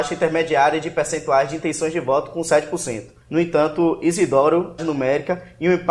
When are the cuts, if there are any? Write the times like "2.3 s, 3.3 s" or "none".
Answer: 3.2 s, 4.8 s